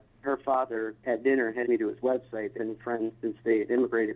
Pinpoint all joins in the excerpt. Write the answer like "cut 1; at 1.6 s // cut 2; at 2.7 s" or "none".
cut 1; at 1.0 s // cut 2; at 1.6 s // cut 3; at 2.5 s